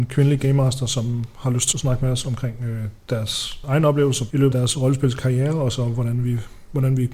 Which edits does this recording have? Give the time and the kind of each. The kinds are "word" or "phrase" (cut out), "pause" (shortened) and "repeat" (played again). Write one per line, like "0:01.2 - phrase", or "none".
0:01.7 - word
0:04.5 - word